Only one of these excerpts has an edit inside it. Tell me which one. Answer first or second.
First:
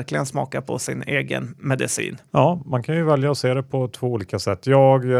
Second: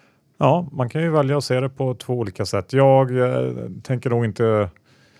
first